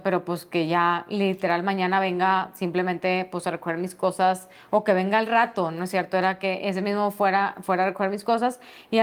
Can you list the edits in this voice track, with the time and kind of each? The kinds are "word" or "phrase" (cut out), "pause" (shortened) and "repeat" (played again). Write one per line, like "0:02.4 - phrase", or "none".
none